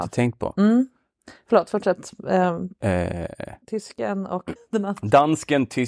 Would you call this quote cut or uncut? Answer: cut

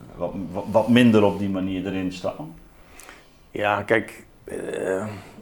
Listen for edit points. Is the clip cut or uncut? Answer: uncut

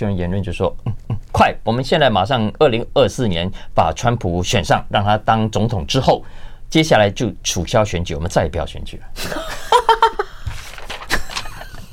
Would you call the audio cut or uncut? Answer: cut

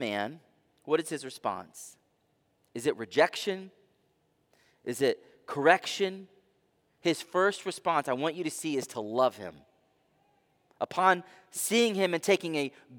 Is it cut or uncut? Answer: uncut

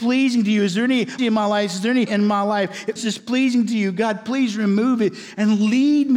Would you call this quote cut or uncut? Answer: cut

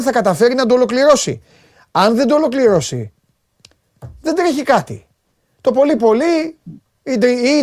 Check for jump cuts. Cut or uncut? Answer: uncut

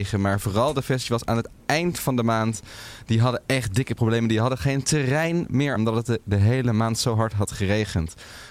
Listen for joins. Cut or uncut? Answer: cut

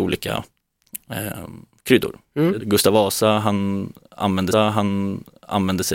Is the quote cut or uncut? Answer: cut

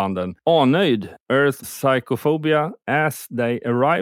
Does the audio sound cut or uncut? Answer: cut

